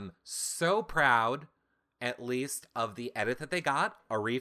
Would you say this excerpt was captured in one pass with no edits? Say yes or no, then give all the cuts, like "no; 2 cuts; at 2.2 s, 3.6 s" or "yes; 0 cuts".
yes; 0 cuts